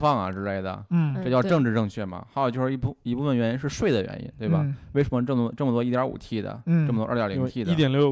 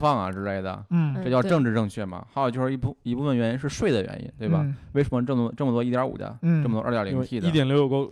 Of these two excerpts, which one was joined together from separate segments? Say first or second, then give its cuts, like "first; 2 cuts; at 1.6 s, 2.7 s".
second; 1 cut; at 6.2 s